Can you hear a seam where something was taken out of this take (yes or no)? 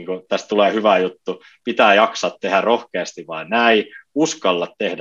no